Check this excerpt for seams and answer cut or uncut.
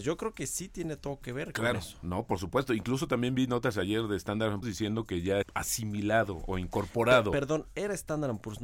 cut